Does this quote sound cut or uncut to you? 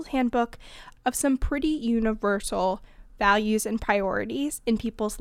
uncut